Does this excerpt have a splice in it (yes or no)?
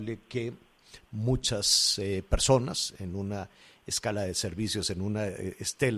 no